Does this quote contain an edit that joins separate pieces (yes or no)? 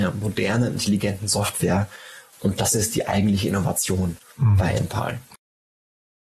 no